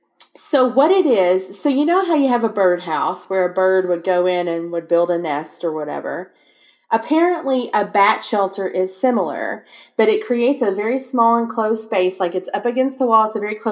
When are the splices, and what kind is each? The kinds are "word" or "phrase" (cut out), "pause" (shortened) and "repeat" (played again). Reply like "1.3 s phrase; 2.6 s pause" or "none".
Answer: none